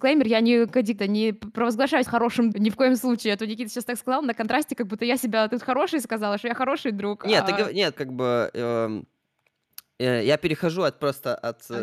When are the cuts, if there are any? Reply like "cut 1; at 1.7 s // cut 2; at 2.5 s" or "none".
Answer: cut 1; at 1.0 s // cut 2; at 2.1 s // cut 3; at 2.5 s // cut 4; at 8.0 s